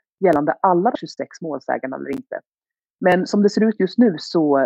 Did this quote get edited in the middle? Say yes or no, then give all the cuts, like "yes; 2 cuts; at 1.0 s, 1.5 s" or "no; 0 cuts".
yes; 1 cut; at 1.0 s